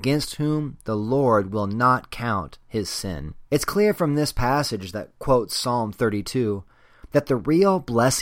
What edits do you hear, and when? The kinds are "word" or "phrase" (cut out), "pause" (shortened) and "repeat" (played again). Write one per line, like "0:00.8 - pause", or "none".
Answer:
0:03.5 - pause